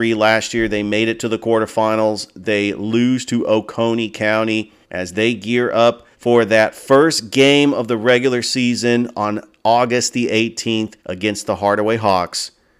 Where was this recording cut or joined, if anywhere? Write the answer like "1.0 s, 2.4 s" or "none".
4.8 s, 6.1 s, 11.0 s